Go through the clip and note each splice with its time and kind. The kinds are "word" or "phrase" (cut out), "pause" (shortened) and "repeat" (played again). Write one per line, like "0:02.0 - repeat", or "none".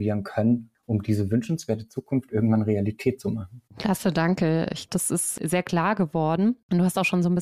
0:03.7 - pause
0:04.9 - word